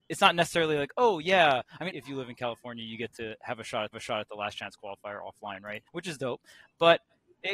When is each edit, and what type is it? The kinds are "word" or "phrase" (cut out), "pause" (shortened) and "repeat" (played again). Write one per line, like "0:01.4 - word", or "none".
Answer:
0:01.9 - word
0:03.9 - repeat
0:05.9 - pause